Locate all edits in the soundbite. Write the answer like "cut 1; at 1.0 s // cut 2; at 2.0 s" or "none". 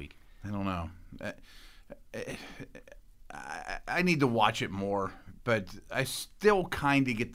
none